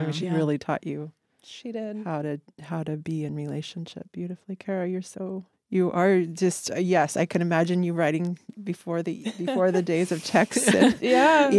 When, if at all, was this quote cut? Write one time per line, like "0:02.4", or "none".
none